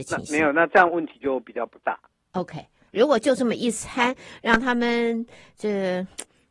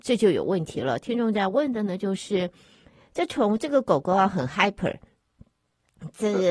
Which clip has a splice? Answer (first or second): first